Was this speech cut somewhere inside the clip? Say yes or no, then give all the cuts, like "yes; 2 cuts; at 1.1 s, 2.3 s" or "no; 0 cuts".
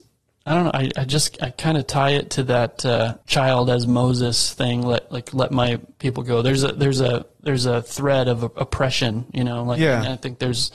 no; 0 cuts